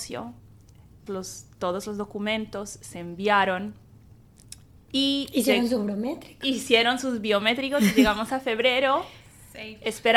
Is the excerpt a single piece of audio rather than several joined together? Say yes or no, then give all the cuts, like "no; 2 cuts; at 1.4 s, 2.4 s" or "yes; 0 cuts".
no; 1 cut; at 1.1 s